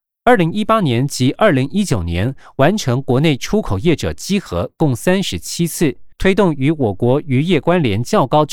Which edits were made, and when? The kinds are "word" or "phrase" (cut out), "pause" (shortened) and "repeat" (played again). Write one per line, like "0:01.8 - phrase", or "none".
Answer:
0:06.1 - pause